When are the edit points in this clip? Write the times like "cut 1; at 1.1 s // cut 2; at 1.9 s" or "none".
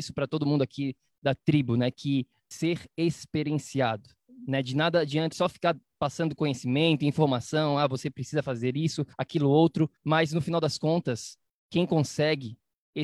cut 1; at 2.5 s // cut 2; at 5.3 s // cut 3; at 9.1 s // cut 4; at 10.0 s